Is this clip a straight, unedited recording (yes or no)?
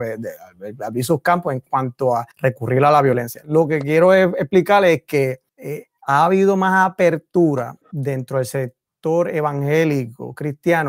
no